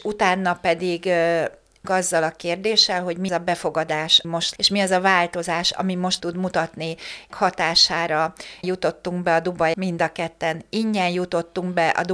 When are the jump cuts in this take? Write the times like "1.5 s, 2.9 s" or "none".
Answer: 1.8 s, 3.3 s, 4.2 s, 4.6 s, 6.2 s, 7.3 s, 8.6 s, 9.7 s